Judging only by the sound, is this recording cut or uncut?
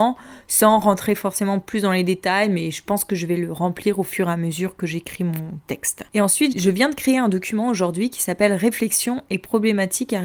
cut